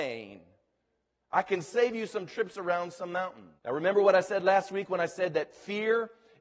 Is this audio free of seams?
no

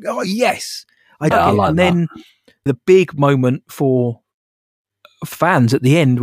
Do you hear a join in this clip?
yes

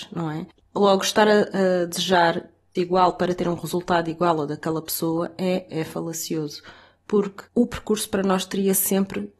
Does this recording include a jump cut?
yes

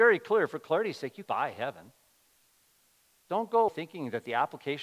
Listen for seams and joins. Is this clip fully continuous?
no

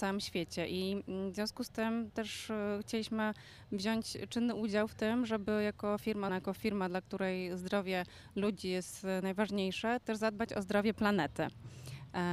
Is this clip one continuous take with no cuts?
no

